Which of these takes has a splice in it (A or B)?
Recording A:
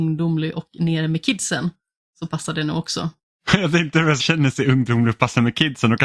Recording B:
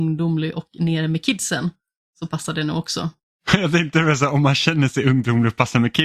A